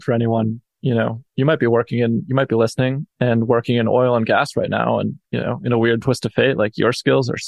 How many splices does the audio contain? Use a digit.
2